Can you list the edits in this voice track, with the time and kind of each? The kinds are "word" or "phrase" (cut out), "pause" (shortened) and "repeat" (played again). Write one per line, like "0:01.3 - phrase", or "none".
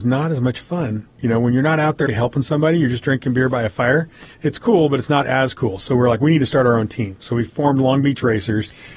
0:02.1 - word
0:04.3 - pause